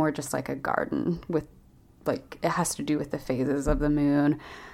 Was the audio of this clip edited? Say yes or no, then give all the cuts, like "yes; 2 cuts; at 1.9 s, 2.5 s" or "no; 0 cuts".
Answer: no; 0 cuts